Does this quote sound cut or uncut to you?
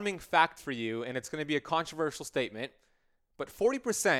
uncut